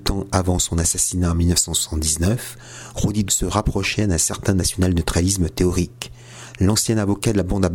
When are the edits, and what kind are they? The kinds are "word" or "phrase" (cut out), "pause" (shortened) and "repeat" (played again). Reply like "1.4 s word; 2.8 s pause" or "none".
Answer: 3.3 s word